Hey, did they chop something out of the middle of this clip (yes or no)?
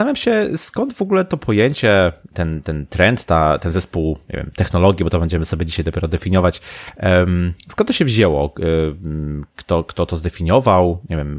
no